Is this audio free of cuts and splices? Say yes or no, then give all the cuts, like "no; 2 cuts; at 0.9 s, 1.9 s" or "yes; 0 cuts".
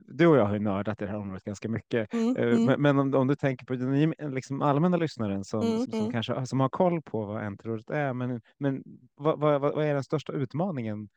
no; 1 cut; at 5.8 s